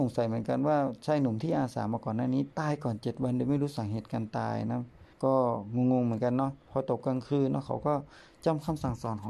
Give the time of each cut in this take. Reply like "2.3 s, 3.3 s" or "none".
2.5 s, 5.1 s